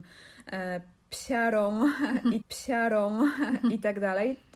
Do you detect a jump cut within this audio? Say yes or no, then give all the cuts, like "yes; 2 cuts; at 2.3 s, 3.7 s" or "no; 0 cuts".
yes; 1 cut; at 2.4 s